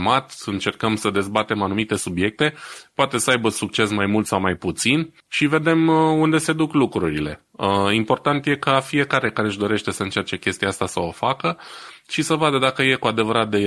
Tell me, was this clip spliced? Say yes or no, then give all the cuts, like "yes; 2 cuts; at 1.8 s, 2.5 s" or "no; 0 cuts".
yes; 1 cut; at 5.2 s